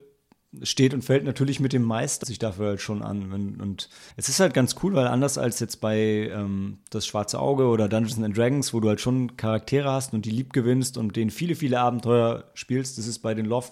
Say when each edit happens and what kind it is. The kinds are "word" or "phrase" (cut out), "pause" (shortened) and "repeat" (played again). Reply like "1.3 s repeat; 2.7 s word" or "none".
2.2 s phrase; 4.1 s pause

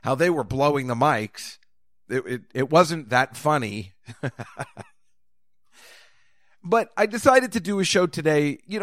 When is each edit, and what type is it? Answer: none

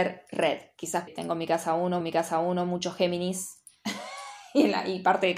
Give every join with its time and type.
1.1 s word; 2.0 s repeat

